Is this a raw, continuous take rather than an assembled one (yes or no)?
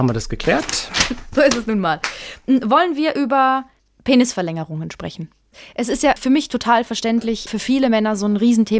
no